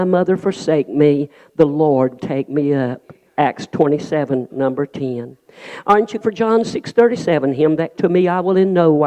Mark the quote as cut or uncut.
cut